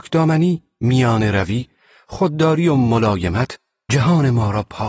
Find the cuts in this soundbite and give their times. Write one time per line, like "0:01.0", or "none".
none